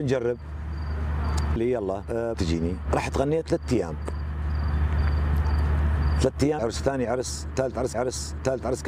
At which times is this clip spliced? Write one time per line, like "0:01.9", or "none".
0:01.6
0:02.3
0:06.6
0:07.9